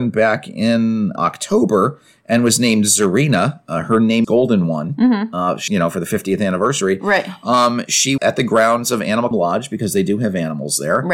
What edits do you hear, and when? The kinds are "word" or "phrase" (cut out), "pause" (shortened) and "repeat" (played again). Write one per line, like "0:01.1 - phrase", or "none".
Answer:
0:01.2 - word
0:04.2 - word
0:05.7 - word
0:08.2 - word
0:09.3 - word